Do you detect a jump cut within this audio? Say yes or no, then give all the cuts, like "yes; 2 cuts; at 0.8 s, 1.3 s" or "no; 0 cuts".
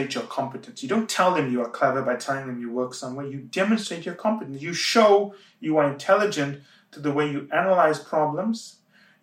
no; 0 cuts